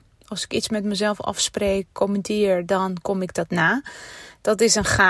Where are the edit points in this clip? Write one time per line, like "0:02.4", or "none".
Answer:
none